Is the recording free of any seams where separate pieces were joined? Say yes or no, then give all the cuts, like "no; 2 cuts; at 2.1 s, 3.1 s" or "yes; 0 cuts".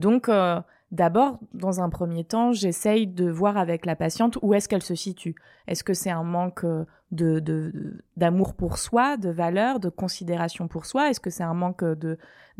yes; 0 cuts